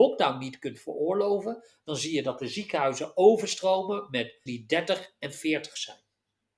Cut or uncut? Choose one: cut